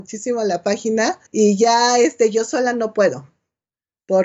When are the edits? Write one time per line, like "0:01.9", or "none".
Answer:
0:01.3